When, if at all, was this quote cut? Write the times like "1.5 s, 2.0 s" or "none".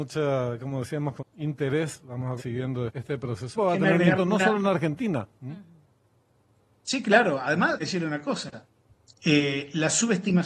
1.2 s, 2.4 s, 2.9 s, 3.5 s, 4.2 s, 7.8 s

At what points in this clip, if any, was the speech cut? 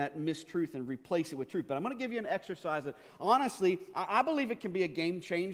none

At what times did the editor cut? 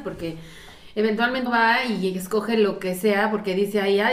1.5 s

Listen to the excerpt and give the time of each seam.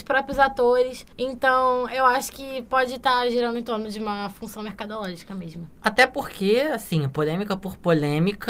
1.1 s

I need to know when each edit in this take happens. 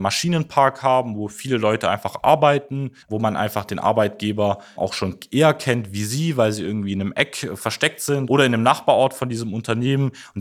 3.0 s, 4.8 s

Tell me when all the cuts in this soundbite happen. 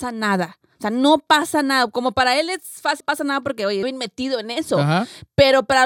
3.0 s, 3.8 s

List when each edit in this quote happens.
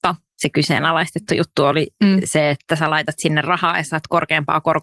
none

